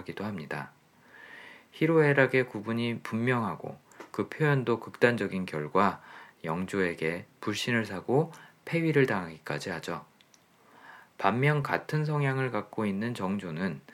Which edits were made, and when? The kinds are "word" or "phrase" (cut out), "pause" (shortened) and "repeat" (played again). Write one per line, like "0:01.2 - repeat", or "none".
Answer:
none

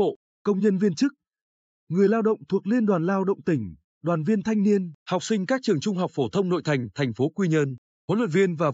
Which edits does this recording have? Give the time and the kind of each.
0:05.0 - pause

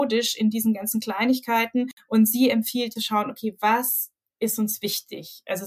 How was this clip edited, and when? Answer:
0:03.0 - phrase

